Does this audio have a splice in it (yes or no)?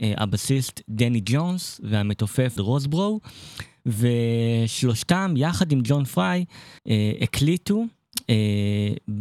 yes